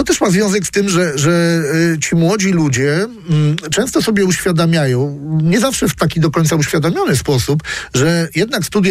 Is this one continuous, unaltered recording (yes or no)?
yes